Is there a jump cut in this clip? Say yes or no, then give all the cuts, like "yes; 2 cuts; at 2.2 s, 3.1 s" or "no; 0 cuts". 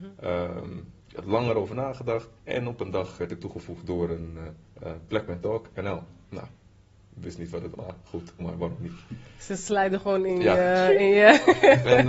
yes; 7 cuts; at 1.0 s, 2.4 s, 3.2 s, 4.7 s, 6.2 s, 7.7 s, 8.4 s